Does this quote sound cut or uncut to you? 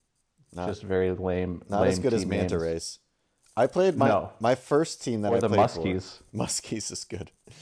uncut